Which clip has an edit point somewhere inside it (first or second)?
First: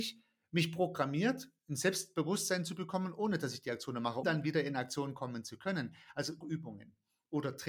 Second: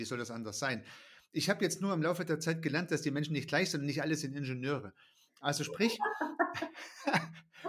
first